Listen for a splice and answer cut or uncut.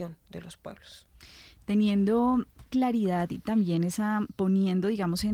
cut